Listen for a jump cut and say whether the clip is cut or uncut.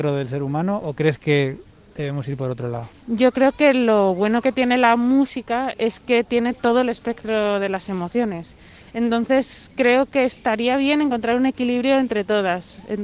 uncut